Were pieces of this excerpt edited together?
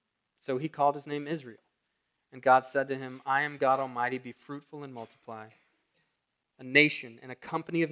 no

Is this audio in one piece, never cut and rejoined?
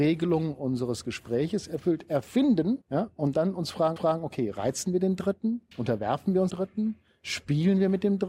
no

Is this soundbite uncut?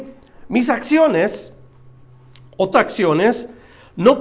no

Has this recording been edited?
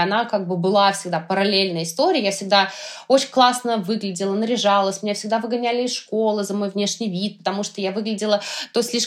no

